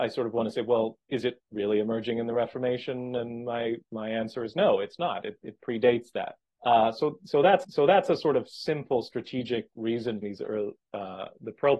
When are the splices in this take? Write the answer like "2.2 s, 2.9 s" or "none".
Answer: 3.8 s, 6.5 s, 7.6 s, 10.2 s